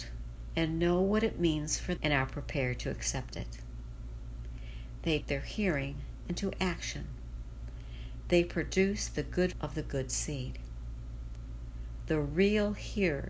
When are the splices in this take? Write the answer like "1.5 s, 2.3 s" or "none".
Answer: 2.0 s, 5.2 s, 9.5 s